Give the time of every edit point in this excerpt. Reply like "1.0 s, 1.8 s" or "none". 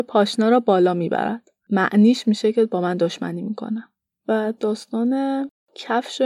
4.2 s